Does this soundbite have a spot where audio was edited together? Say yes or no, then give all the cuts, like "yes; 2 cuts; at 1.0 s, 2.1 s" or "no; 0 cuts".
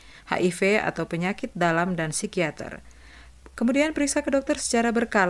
no; 0 cuts